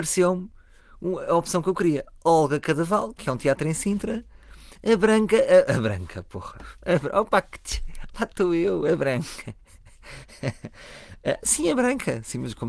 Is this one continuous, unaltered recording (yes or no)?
yes